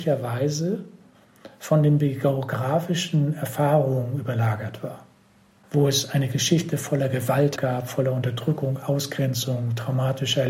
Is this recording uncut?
no; 1 cut; at 7.6 s

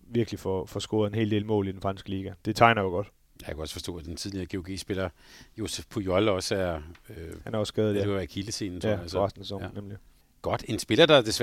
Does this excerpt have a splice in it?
no; 0 cuts

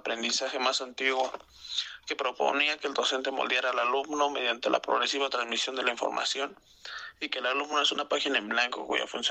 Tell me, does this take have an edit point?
no; 0 cuts

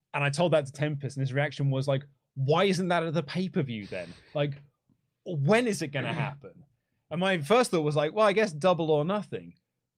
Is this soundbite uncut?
yes; 0 cuts

